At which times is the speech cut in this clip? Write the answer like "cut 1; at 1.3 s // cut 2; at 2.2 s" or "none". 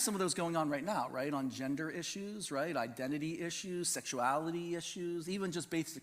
none

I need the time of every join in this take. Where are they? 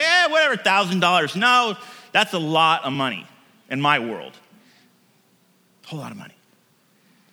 none

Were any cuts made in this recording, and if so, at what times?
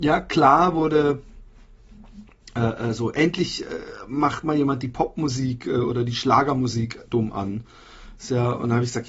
none

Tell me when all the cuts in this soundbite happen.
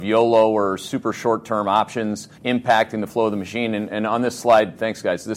cut 1; at 2.3 s

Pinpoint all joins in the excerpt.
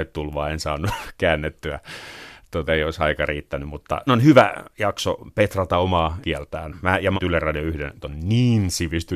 cut 1; at 2.7 s // cut 2; at 4.1 s // cut 3; at 6.2 s // cut 4; at 7.2 s // cut 5; at 8.0 s

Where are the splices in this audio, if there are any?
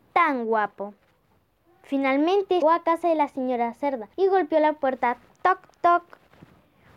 cut 1; at 2.6 s // cut 2; at 4.1 s

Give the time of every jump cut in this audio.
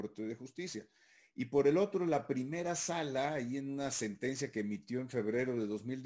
none

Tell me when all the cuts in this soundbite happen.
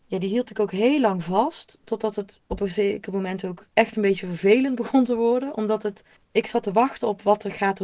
cut 1; at 3.7 s // cut 2; at 6.2 s

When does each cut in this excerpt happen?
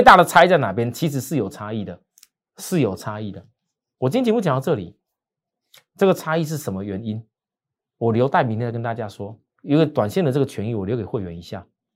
cut 1; at 9.5 s

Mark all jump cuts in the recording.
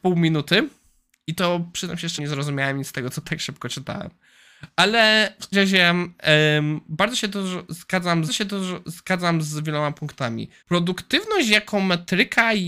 cut 1; at 2.2 s // cut 2; at 3.2 s // cut 3; at 5.5 s // cut 4; at 8.3 s // cut 5; at 10.6 s

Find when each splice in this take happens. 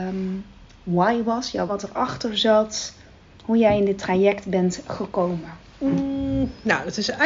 cut 1; at 1.7 s

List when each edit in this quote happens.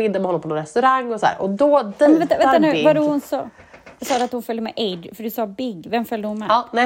none

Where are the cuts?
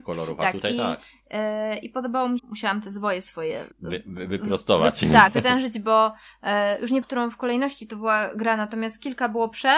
cut 1; at 2.4 s // cut 2; at 3.7 s // cut 3; at 5.3 s // cut 4; at 7.0 s

